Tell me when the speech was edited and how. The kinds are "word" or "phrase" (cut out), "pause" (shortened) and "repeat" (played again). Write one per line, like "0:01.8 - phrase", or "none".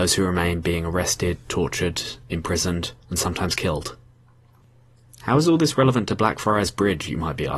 0:03.0 - pause